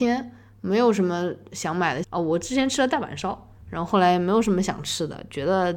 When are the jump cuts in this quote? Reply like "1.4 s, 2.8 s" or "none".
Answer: 2.0 s